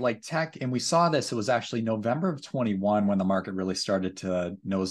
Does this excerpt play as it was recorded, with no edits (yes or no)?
yes